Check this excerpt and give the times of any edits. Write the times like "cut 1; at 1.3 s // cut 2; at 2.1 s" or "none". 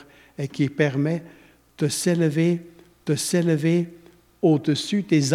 cut 1; at 3.1 s

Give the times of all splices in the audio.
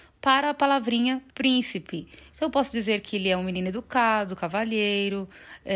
cut 1; at 1.3 s

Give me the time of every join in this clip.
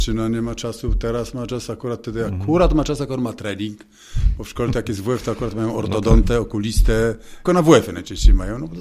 cut 1; at 7.5 s

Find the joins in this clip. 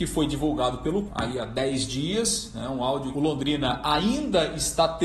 cut 1; at 1.1 s // cut 2; at 3.1 s

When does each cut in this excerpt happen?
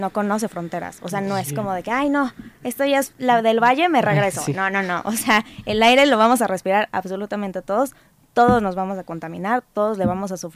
none

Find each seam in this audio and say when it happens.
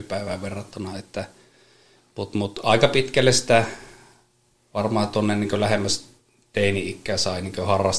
none

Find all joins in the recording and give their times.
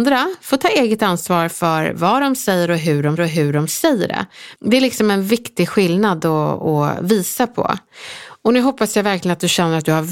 cut 1; at 3.2 s // cut 2; at 4.6 s

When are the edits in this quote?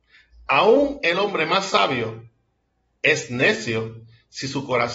none

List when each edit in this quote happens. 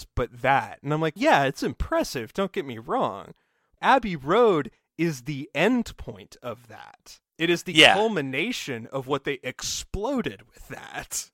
cut 1; at 1.2 s // cut 2; at 3.8 s

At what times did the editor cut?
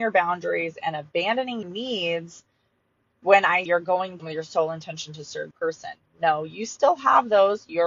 cut 1; at 1.6 s // cut 2; at 3.7 s // cut 3; at 4.2 s // cut 4; at 5.5 s

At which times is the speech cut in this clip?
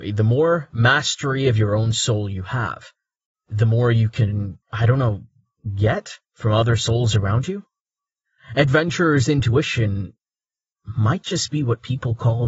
cut 1; at 4.6 s // cut 2; at 6.2 s

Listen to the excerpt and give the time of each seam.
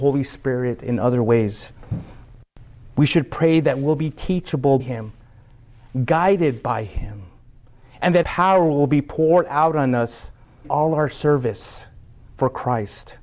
cut 1; at 4.8 s // cut 2; at 8.2 s // cut 3; at 10.6 s

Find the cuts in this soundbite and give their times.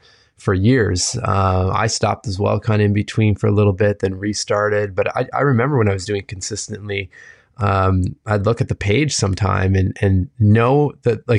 none

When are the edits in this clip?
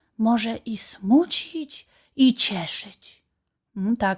none

